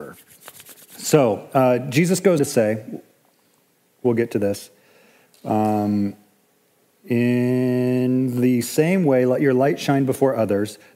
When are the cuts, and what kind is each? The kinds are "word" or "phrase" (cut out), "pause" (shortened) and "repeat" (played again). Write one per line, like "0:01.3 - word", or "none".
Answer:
0:02.4 - word